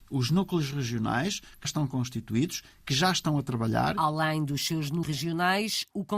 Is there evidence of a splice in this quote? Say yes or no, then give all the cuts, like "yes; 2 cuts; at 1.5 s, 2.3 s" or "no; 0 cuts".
yes; 2 cuts; at 1.6 s, 5.0 s